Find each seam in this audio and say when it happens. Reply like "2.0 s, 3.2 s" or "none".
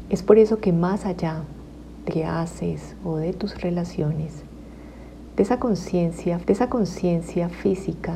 2.1 s, 6.4 s